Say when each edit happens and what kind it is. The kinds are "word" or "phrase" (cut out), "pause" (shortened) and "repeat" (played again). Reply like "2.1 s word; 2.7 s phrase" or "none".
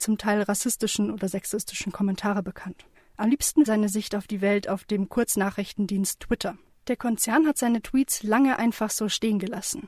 3.7 s phrase